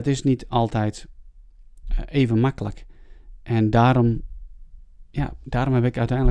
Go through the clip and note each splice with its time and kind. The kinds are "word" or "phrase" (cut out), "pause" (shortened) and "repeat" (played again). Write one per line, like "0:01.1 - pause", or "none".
0:05.1 - pause

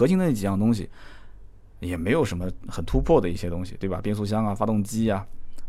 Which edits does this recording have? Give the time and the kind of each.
none

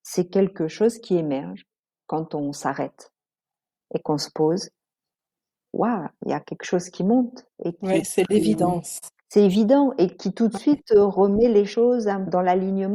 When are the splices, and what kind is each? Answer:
0:07.5 - pause
0:09.2 - pause
0:10.1 - word

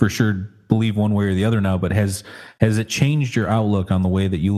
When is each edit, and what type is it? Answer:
none

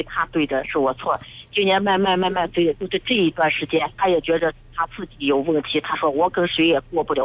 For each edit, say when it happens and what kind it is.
0:04.0 - word

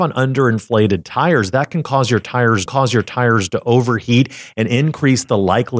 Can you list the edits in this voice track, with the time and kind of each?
0:02.7 - repeat

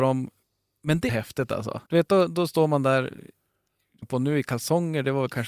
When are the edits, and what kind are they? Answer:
0:01.1 - word
0:01.9 - pause
0:04.0 - word

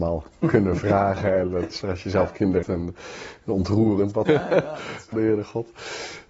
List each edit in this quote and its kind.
0:01.8 - word
0:02.6 - word
0:04.3 - phrase
0:05.1 - word

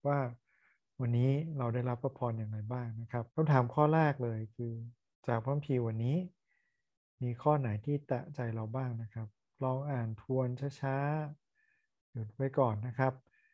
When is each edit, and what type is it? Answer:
0:03.3 - pause

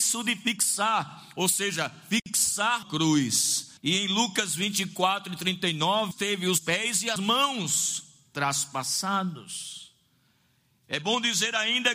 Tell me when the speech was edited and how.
0:02.8 - word
0:03.8 - pause
0:06.1 - phrase
0:06.6 - word
0:07.2 - word

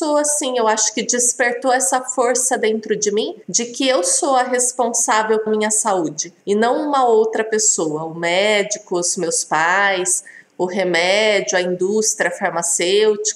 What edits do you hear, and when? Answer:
0:03.4 - pause
0:05.5 - word
0:06.4 - pause

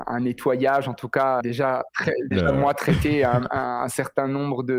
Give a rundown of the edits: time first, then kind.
0:01.4 - word
0:02.3 - word

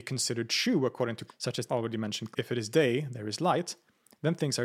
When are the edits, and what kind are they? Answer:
0:01.3 - word
0:01.7 - word
0:02.3 - word

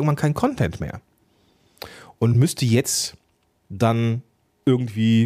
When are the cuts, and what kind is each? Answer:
none

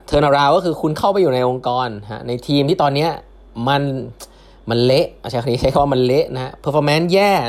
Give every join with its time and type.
none

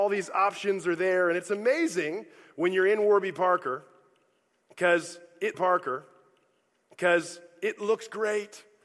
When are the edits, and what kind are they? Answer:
0:05.5 - repeat

